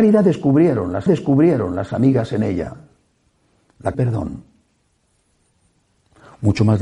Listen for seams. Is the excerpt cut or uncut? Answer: cut